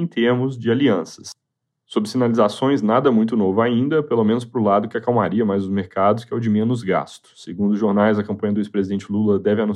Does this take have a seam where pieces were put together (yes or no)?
no